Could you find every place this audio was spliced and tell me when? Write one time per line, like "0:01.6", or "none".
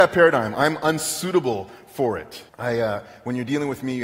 0:02.5